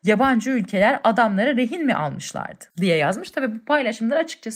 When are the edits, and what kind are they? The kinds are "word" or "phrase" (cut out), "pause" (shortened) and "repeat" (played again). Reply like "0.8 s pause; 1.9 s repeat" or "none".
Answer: 2.7 s pause